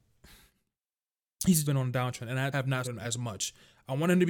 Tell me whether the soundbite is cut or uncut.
cut